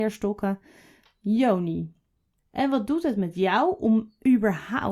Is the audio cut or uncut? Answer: uncut